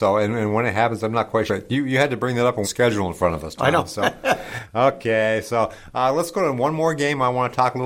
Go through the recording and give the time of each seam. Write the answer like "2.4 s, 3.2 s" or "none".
1.5 s, 2.6 s